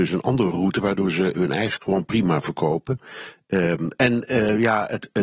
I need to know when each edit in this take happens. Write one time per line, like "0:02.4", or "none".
0:01.3
0:01.8